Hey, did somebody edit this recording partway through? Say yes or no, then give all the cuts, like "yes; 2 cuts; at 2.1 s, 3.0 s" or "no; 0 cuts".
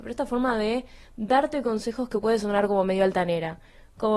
no; 0 cuts